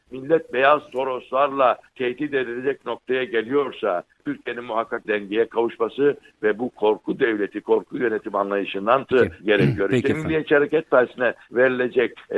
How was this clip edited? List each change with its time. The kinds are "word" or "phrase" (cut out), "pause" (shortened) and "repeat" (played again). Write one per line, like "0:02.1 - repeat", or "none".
0:05.0 - word
0:09.1 - word